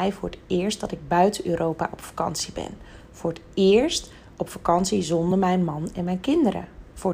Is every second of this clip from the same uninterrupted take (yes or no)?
yes